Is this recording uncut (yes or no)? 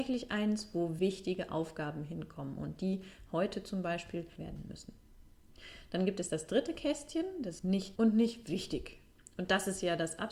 no